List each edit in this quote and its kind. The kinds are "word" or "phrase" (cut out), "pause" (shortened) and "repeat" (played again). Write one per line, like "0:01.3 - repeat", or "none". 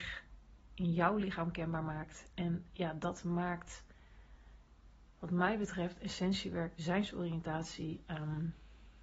none